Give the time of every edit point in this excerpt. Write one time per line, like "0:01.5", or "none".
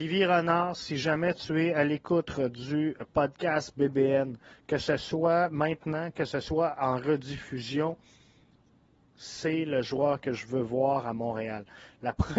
none